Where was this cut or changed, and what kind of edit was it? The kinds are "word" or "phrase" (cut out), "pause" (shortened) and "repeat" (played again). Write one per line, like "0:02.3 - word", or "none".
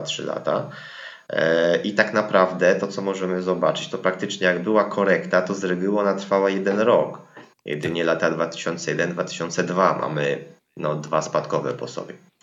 none